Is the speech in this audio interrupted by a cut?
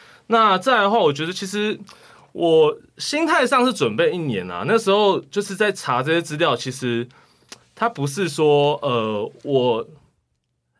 no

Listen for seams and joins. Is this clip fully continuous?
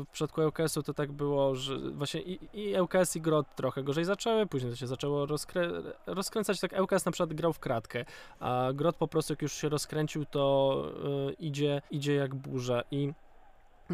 no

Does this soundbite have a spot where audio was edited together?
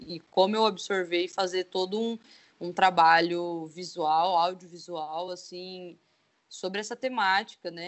no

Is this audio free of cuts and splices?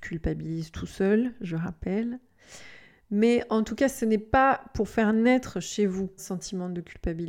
no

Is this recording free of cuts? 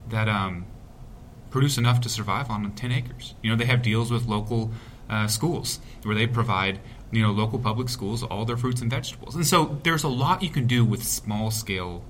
yes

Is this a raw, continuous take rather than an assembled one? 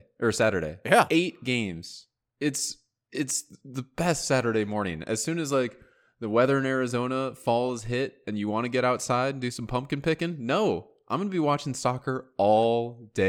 yes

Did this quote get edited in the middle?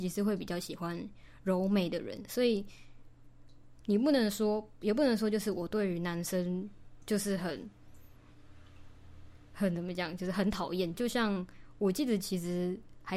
yes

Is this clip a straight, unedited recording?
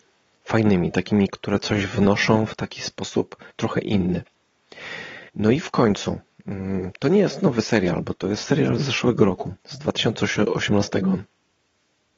no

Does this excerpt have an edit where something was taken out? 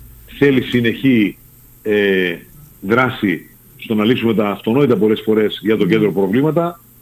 no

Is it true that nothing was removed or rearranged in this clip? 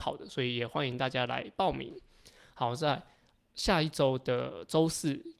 yes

